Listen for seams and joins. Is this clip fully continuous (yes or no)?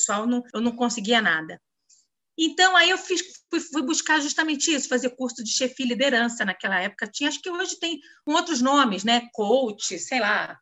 yes